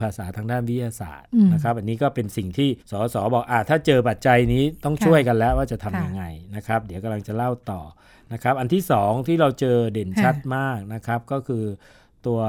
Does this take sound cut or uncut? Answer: cut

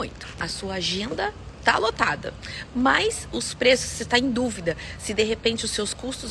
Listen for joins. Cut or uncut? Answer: uncut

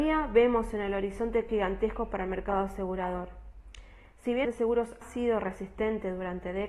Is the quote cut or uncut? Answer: cut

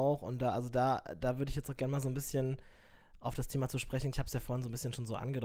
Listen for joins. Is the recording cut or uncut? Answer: cut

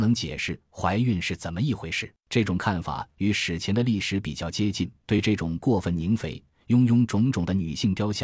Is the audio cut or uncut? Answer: cut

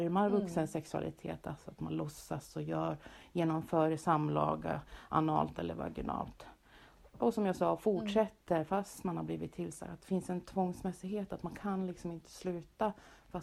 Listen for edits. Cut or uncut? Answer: uncut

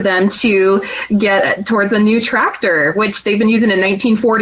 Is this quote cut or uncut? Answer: uncut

